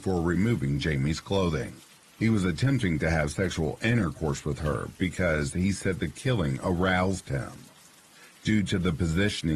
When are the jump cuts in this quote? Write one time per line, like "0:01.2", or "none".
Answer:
none